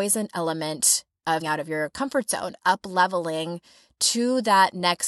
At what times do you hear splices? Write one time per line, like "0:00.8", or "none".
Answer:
0:01.4
0:02.6